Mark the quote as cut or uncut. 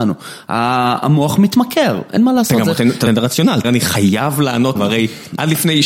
cut